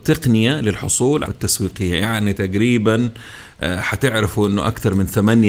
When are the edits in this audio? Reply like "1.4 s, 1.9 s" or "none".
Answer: 1.3 s